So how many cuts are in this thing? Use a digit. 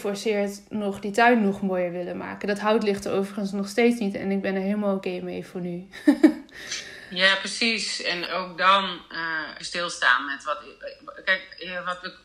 2